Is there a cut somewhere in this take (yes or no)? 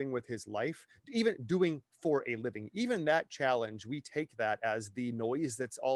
no